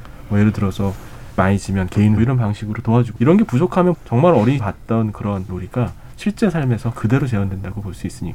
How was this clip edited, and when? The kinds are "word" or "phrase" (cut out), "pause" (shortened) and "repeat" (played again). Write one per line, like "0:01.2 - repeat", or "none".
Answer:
0:01.4 - word
0:02.2 - phrase
0:03.2 - word
0:03.9 - word
0:04.6 - word
0:05.5 - word